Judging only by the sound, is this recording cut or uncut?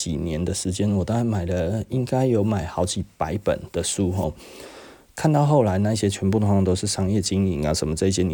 uncut